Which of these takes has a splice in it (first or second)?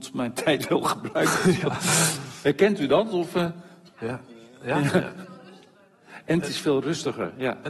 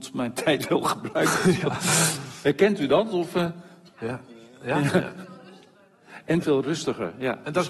second